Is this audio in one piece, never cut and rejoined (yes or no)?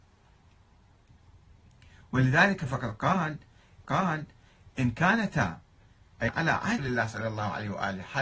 no